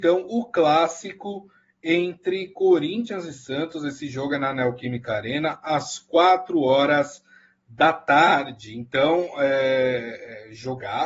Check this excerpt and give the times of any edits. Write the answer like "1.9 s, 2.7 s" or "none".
none